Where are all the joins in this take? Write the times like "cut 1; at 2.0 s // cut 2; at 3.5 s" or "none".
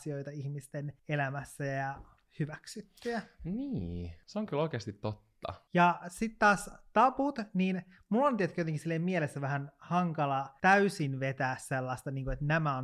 none

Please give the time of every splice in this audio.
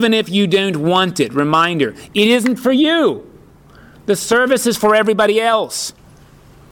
none

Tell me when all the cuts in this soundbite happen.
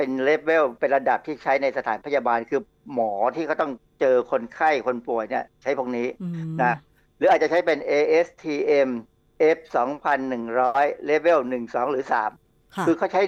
none

